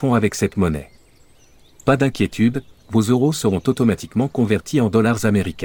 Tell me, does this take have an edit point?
no; 0 cuts

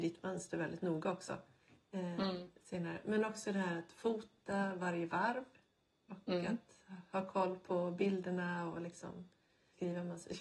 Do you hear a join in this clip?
no; 0 cuts

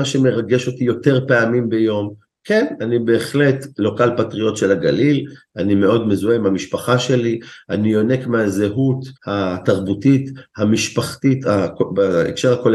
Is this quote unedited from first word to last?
no; 1 cut; at 9.2 s

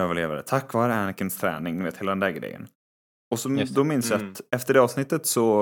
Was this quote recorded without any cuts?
yes; 0 cuts

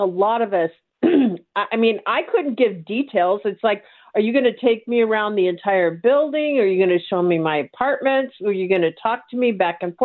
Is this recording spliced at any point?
no; 0 cuts

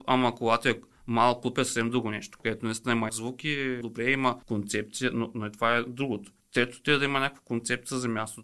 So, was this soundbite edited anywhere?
yes; 4 cuts; at 3.1 s, 3.8 s, 4.4 s, 6.4 s

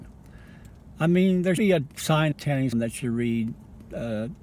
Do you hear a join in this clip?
yes; 3 cuts; at 1.6 s, 2.3 s, 2.7 s

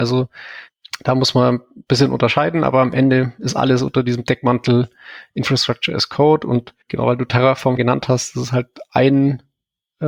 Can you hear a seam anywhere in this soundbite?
yes; 2 cuts; at 6.8 s, 7.8 s

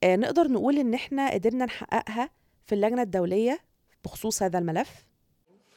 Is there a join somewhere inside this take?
no; 0 cuts

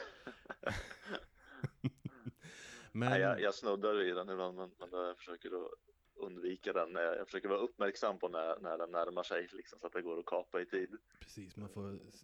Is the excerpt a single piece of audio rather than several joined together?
yes; 0 cuts

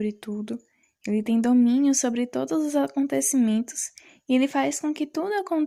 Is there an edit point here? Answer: no; 0 cuts

